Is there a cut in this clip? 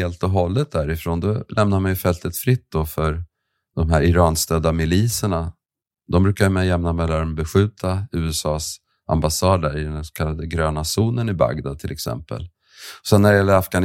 no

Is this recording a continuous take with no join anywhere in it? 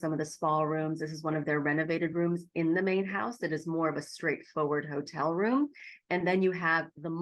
yes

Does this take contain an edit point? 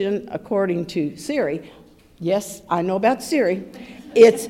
no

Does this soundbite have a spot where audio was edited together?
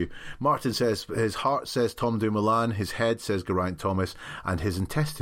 no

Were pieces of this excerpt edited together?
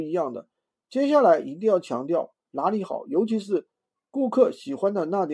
yes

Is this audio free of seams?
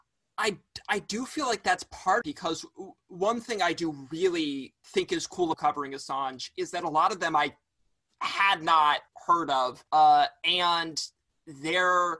no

